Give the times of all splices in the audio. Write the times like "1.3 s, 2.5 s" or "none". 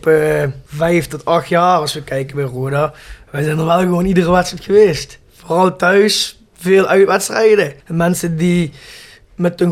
none